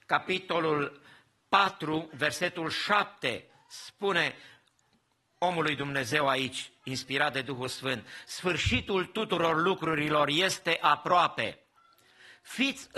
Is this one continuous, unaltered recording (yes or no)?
yes